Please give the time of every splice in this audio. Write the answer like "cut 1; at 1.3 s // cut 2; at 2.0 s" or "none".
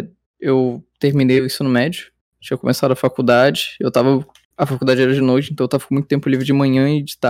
none